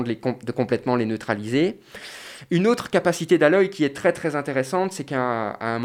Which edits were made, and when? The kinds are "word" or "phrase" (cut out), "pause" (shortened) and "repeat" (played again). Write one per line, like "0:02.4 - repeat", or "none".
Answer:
none